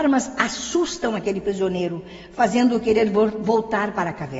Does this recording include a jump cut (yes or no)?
no